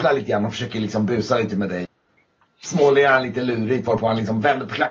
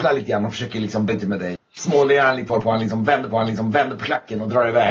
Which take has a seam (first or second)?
second